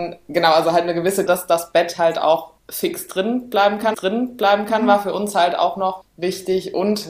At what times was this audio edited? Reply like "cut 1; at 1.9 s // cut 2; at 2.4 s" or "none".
cut 1; at 1.3 s // cut 2; at 2.6 s // cut 3; at 3.9 s // cut 4; at 6.0 s